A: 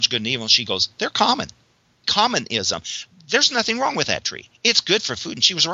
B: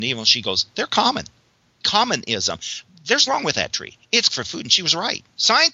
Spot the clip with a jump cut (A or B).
B